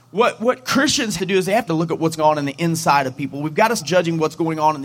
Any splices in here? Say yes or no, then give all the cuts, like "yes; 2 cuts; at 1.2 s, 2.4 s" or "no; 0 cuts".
yes; 4 cuts; at 1.2 s, 1.7 s, 2.2 s, 3.8 s